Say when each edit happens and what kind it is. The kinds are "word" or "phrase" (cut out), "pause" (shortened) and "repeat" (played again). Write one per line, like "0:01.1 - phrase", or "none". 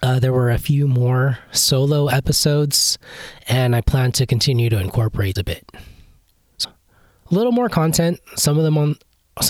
0:05.4 - word
0:06.6 - word